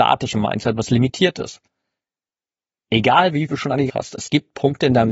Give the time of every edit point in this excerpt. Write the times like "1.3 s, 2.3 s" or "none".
3.5 s, 3.9 s